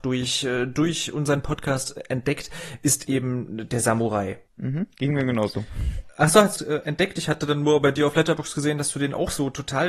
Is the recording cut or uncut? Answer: cut